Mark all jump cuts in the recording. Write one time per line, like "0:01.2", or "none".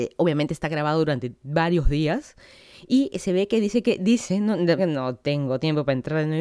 0:04.8